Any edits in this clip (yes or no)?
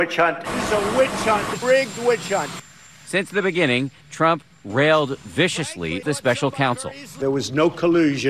yes